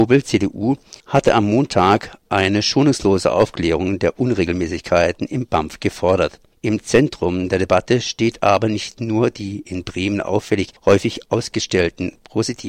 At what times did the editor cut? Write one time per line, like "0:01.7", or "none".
0:01.0
0:06.5
0:10.8